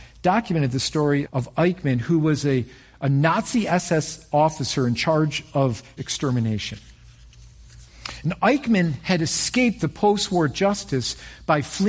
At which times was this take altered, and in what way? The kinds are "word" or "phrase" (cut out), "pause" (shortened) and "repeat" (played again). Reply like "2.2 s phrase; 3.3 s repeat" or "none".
1.2 s word; 6.0 s word